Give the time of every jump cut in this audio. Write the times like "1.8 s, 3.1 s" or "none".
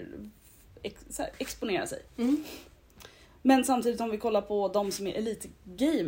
none